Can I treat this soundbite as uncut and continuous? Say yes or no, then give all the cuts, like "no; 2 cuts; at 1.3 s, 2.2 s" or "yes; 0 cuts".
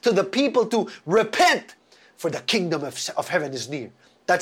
yes; 0 cuts